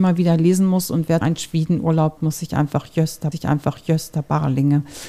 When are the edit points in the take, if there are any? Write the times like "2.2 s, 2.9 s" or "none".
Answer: 1.2 s, 2.2 s, 3.3 s